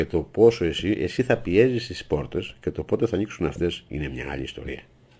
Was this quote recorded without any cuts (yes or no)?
yes